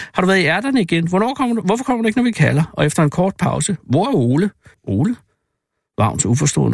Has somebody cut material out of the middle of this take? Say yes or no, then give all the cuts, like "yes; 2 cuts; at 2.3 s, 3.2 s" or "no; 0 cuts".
yes; 1 cut; at 4.7 s